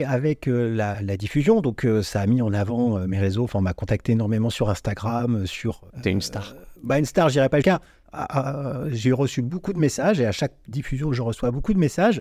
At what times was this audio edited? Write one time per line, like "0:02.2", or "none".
0:00.9
0:05.9
0:06.8
0:07.6